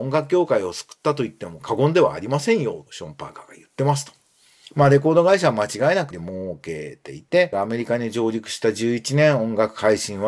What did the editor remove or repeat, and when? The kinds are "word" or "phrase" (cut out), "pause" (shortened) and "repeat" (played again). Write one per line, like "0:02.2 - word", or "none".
0:02.9 - word
0:06.1 - word
0:07.5 - word